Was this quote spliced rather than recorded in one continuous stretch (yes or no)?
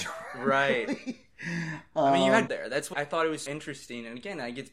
yes